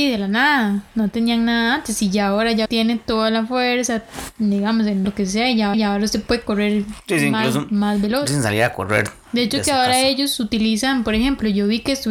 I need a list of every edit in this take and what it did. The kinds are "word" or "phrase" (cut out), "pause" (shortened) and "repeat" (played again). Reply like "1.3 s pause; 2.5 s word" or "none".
2.6 s word; 5.0 s word; 5.7 s repeat; 8.3 s phrase

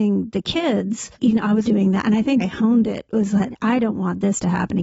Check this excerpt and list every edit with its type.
1.1 s pause; 1.6 s word; 2.4 s phrase

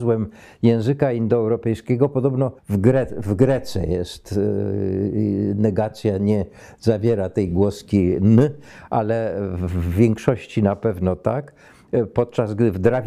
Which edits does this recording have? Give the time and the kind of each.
2.6 s pause

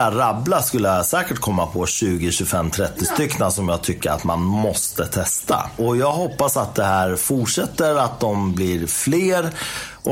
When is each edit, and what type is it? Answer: none

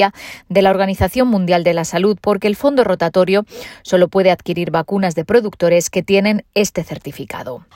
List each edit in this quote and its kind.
none

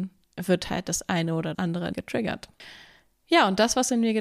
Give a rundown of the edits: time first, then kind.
1.5 s word; 1.9 s word

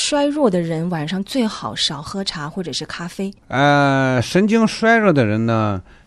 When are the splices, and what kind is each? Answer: 3.4 s pause

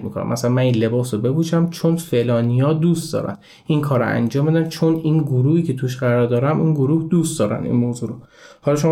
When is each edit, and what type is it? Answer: none

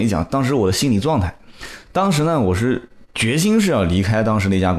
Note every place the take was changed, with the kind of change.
none

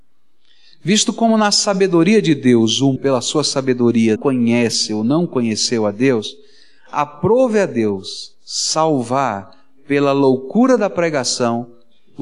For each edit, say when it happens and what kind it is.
3.0 s word; 4.2 s word

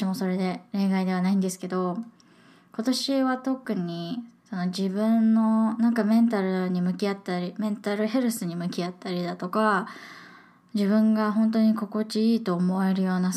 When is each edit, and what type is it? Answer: none

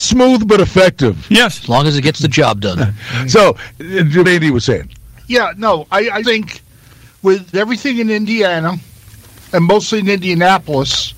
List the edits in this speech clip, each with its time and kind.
4.2 s word; 6.2 s word; 7.5 s word

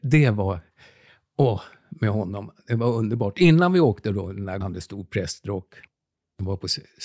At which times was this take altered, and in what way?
4.6 s phrase

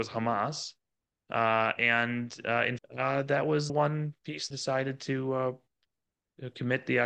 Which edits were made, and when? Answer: 2.8 s word; 3.7 s word; 4.5 s word

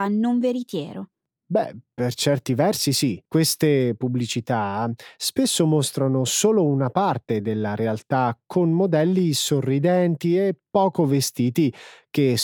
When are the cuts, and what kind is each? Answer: 3.3 s pause

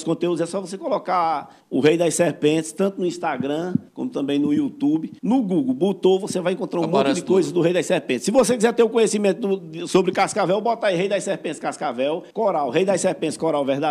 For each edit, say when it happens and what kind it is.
1.6 s pause; 3.9 s pause; 5.2 s pause; 12.3 s pause

